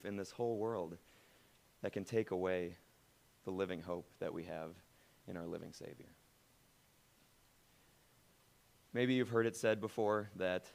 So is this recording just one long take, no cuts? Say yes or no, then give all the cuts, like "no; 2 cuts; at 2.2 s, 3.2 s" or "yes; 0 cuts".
yes; 0 cuts